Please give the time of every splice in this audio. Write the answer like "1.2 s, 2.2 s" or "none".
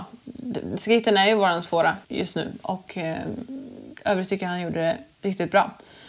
2.0 s